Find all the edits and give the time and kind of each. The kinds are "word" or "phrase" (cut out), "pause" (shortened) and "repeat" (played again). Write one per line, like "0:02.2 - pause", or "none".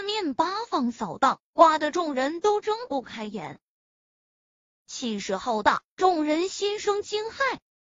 none